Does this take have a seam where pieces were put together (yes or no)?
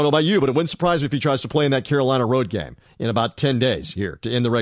no